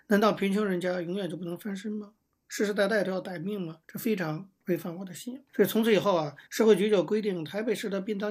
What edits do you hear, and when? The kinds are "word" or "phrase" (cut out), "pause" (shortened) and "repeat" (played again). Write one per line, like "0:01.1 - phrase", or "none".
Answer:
0:03.8 - pause
0:05.5 - pause
0:06.5 - pause